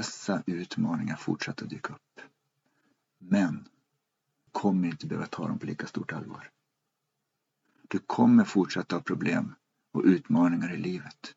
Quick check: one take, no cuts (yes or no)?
yes